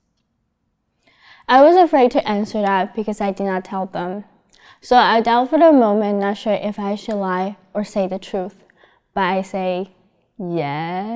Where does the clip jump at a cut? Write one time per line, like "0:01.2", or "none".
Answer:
none

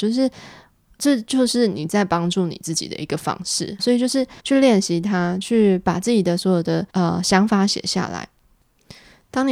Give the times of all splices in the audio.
0:03.8
0:04.4
0:06.9

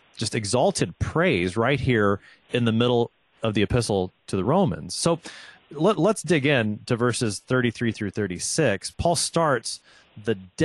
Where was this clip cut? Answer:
none

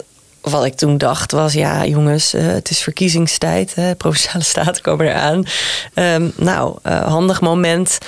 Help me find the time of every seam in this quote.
none

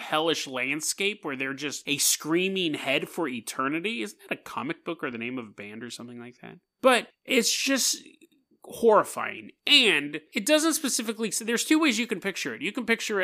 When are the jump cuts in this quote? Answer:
none

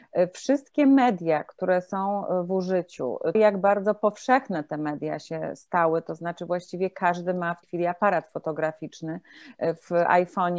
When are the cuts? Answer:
0:03.3
0:07.6

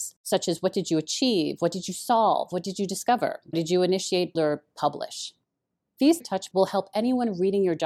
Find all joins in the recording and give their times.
0:03.5
0:04.3
0:06.2
0:06.5

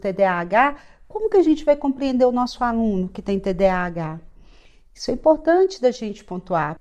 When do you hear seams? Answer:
none

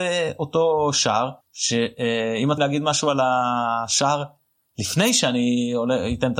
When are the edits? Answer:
0:01.4
0:02.6

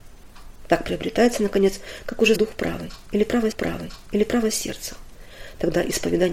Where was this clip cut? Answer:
0:02.3
0:03.5

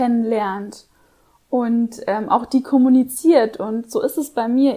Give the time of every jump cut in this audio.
none

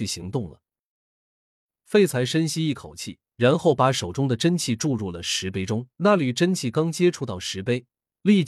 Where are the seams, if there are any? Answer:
0:03.3
0:05.9

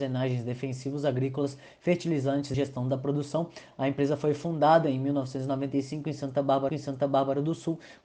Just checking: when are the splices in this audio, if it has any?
0:02.5
0:06.7

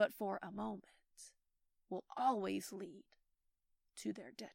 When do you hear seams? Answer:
none

